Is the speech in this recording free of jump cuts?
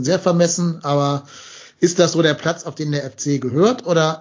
yes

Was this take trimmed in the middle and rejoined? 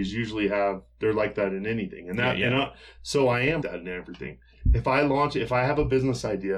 yes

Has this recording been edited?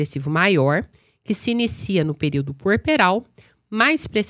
no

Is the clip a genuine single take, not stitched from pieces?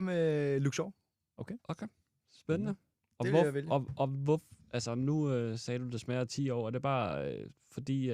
yes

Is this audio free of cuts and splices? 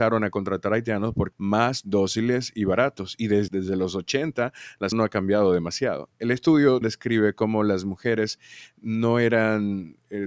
no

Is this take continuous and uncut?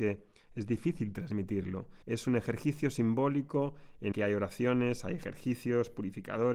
no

